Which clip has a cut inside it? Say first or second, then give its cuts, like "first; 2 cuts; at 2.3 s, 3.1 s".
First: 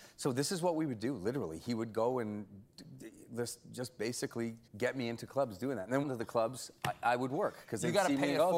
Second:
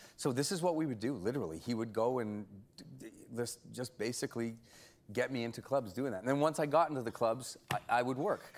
first; 2 cuts; at 4.7 s, 6.0 s